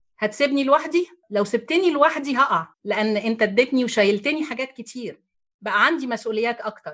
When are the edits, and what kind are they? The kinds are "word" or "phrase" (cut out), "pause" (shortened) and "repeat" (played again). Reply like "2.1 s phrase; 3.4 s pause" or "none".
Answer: 1.2 s pause; 2.7 s pause